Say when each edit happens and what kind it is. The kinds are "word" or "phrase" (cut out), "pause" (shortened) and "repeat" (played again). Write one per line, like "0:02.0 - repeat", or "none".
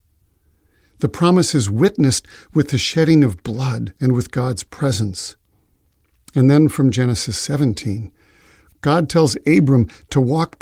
0:04.0 - pause